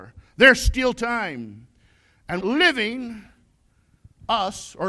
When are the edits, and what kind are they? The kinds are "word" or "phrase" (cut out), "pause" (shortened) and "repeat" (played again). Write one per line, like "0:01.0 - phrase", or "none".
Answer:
0:02.4 - word